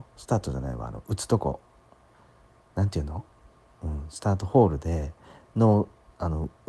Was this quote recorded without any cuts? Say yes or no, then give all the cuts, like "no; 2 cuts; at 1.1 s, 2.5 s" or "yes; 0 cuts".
yes; 0 cuts